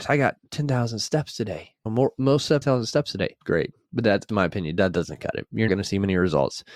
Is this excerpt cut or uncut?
cut